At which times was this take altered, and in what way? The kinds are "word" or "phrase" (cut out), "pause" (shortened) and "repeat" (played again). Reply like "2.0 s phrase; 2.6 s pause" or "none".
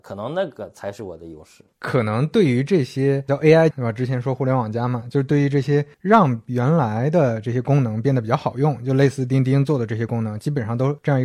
3.7 s word